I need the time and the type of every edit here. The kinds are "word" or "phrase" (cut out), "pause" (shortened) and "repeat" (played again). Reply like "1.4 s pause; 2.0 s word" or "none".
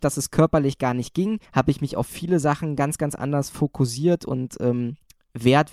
1.5 s pause